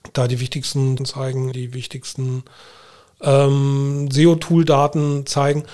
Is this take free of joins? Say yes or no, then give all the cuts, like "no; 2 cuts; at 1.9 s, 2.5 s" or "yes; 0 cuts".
no; 2 cuts; at 1.0 s, 1.5 s